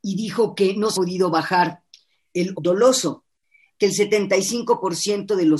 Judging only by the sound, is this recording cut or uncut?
cut